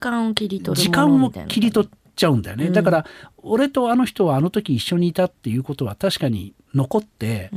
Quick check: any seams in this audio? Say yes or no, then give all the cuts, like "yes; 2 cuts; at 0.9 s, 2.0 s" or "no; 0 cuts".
no; 0 cuts